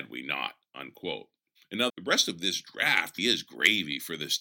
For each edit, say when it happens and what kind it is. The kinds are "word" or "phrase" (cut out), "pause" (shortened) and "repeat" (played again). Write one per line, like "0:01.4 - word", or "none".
0:01.9 - word
0:03.2 - word